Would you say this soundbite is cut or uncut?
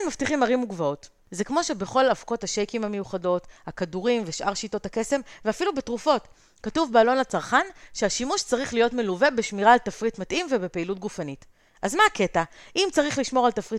uncut